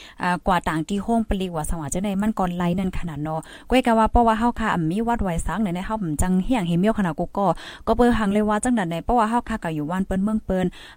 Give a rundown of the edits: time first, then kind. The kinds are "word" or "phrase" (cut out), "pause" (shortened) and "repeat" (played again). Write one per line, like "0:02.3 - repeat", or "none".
none